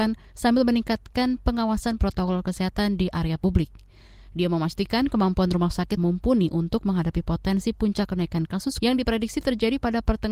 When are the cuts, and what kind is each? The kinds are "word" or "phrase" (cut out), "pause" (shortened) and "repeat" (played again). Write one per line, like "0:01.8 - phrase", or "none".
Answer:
0:02.0 - word
0:06.0 - word
0:08.8 - word

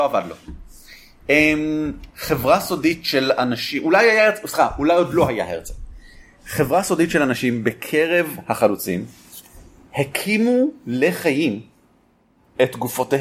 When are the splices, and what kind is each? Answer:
none

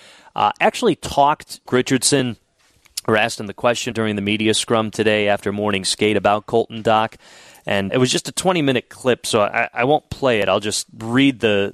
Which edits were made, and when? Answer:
0:01.7 - phrase
0:03.9 - word
0:07.9 - word

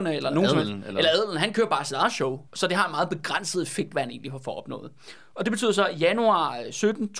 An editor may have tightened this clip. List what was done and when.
0:02.5 - pause

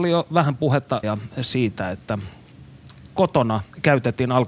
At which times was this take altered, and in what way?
0:01.0 - word

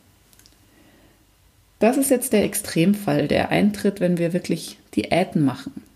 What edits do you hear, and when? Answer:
none

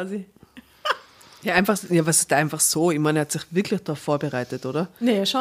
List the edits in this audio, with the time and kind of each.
none

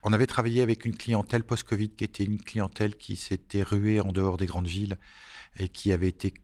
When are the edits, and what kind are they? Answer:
none

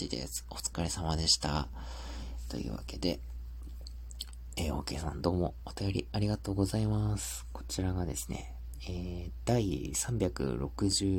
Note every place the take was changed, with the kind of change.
none

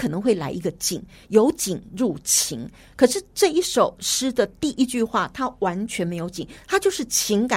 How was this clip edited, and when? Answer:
none

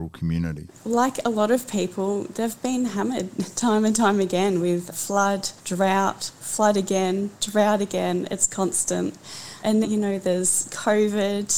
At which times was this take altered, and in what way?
0:05.6 - pause
0:09.8 - word

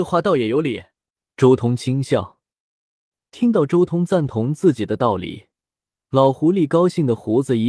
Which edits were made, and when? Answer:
0:01.1 - pause

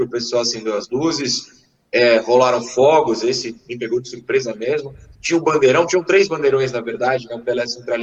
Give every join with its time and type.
none

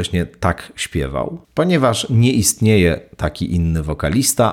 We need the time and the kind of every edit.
0:01.4 - pause

